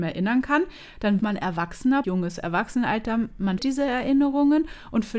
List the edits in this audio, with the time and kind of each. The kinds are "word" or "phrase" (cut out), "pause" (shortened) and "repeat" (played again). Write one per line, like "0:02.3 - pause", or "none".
0:01.2 - word
0:02.0 - word
0:03.6 - word